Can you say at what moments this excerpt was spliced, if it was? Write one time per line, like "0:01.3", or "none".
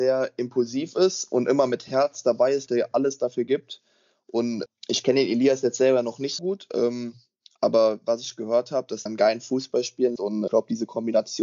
0:02.7
0:04.7
0:06.4
0:09.1
0:10.2
0:10.5